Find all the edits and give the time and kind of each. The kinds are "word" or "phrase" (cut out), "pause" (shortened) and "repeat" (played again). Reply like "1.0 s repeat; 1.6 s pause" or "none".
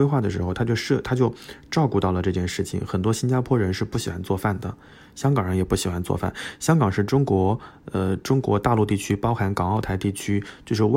none

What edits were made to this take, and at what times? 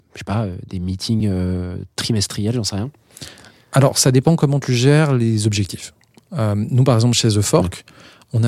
none

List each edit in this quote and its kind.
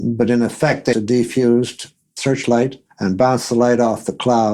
0.9 s word; 2.9 s pause

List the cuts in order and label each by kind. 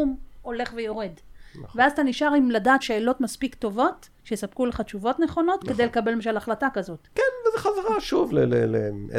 2.8 s word; 4.2 s pause

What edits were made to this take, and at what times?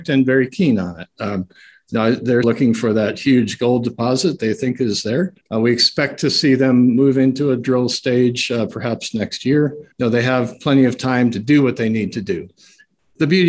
2.4 s word; 4.4 s word; 5.4 s pause; 9.9 s pause

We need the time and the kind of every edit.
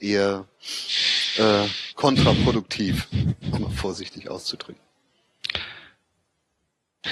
3.6 s word

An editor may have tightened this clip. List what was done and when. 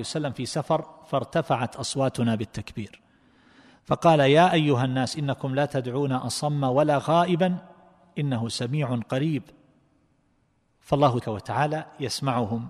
11.2 s word

